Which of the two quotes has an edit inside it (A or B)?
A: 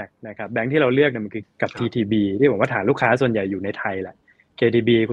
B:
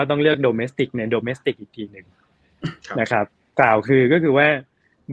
A